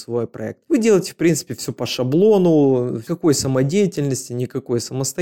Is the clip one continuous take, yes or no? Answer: yes